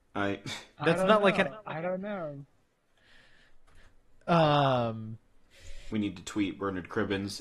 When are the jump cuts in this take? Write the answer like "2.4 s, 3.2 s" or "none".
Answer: 5.9 s